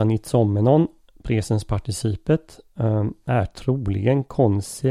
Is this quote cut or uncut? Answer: uncut